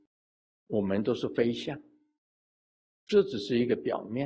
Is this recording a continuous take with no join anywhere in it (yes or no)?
no